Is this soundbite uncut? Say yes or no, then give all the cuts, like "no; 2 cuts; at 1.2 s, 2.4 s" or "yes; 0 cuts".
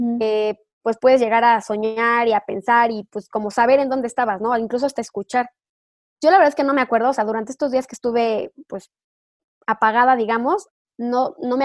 yes; 0 cuts